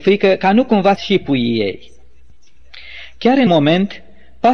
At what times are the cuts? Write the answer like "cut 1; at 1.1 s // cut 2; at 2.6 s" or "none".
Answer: cut 1; at 1.0 s // cut 2; at 3.5 s